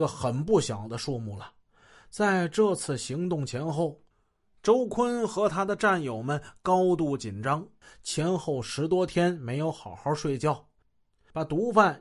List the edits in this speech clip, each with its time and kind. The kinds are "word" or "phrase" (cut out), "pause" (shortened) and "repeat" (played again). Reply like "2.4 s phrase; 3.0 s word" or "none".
none